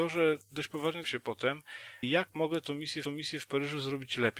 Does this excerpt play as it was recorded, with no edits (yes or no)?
no